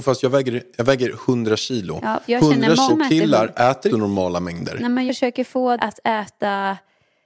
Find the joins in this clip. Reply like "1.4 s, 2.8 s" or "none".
2.3 s, 2.9 s, 3.9 s, 5.1 s, 5.8 s